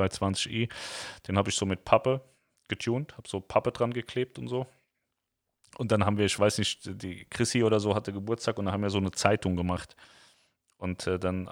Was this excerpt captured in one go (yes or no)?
yes